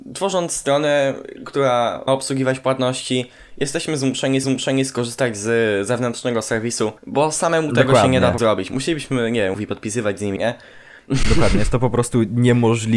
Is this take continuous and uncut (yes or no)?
no